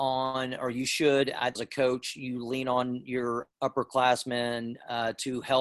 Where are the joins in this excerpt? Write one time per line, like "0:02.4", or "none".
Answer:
0:01.6
0:03.5